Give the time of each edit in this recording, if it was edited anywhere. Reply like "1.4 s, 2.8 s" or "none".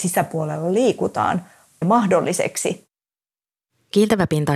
1.8 s

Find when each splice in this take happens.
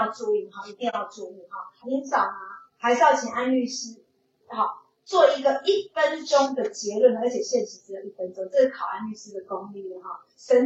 none

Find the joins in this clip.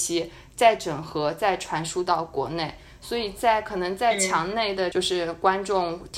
none

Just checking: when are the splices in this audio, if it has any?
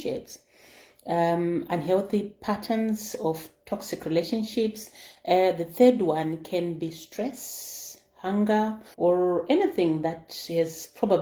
8.9 s

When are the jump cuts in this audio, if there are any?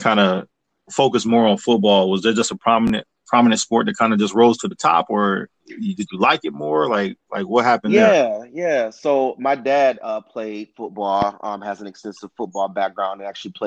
none

